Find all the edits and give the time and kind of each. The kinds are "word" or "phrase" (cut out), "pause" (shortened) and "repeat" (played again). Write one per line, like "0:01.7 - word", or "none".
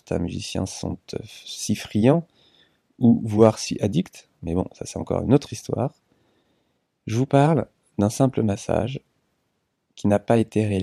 none